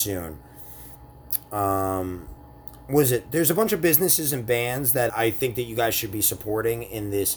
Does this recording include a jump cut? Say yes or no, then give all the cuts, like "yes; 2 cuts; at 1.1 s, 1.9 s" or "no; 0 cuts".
yes; 1 cut; at 5.1 s